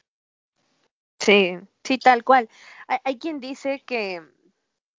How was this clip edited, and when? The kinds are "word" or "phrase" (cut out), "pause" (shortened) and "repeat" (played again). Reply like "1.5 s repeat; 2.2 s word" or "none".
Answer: none